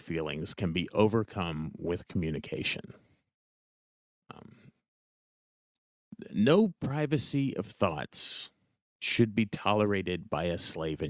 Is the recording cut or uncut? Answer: uncut